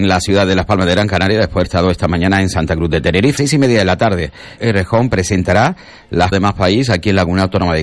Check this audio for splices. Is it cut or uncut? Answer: cut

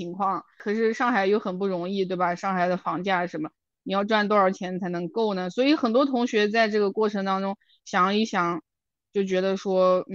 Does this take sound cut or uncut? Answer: uncut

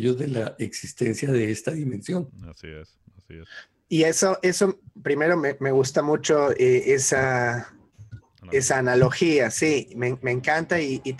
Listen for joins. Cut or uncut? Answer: uncut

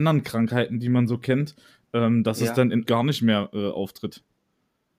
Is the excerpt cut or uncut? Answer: cut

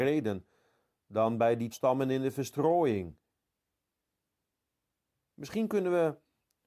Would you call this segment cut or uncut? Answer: cut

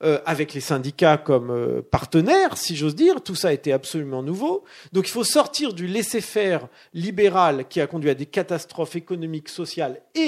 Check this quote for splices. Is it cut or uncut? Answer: uncut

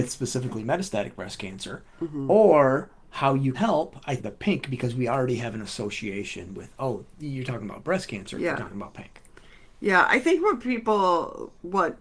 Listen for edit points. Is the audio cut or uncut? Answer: cut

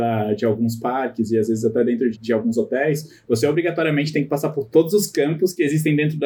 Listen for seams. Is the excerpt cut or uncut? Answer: cut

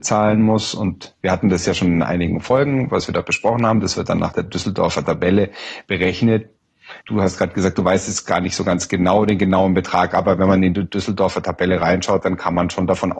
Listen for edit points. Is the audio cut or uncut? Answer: cut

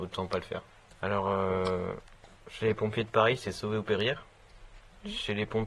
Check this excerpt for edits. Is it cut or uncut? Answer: cut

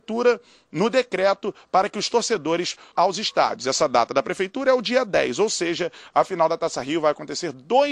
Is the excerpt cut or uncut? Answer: cut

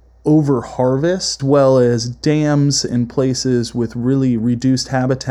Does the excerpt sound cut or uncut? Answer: cut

